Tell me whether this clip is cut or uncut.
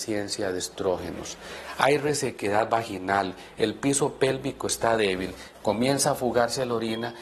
uncut